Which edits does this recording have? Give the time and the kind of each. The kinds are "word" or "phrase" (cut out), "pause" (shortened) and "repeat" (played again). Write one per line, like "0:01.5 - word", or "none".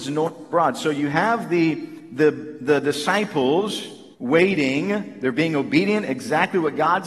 0:04.1 - pause

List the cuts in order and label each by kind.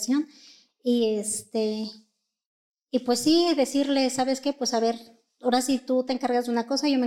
none

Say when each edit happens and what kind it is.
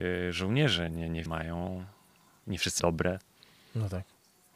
0:01.3 - word
0:02.8 - word

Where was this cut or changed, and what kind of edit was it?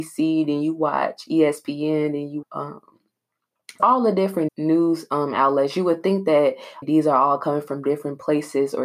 0:02.4 - word
0:03.8 - word
0:04.5 - word
0:06.8 - word

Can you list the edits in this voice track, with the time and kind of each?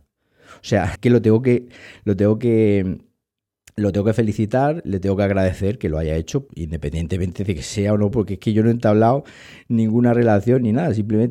0:01.0 - word
0:06.5 - word
0:08.1 - word

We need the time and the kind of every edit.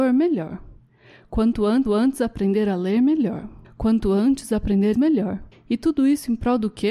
0:01.9 - repeat
0:03.6 - pause
0:04.9 - word
0:05.5 - pause

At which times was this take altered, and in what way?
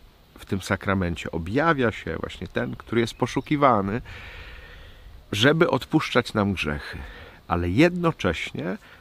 0:05.2 - pause

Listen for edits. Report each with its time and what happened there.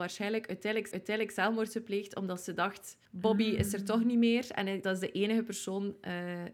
0:00.9 - repeat
0:03.1 - pause
0:04.8 - word

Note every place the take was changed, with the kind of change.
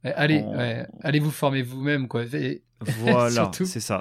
none

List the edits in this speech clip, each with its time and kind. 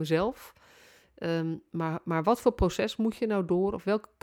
none

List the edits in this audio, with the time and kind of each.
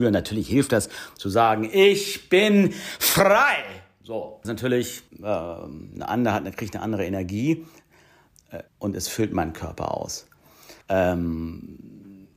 0:04.4 - word
0:05.1 - pause
0:08.7 - pause
0:10.8 - pause

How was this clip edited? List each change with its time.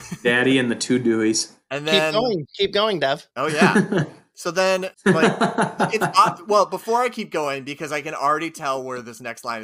0:03.3 - pause
0:04.9 - pause

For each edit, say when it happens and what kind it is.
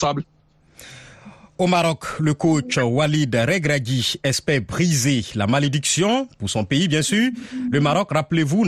none

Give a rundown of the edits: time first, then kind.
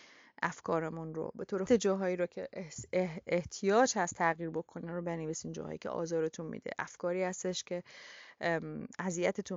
0:01.7 - phrase

